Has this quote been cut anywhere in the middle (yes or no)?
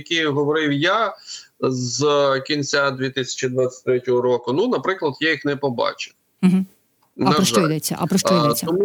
no